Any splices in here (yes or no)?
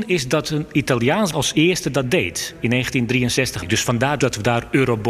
yes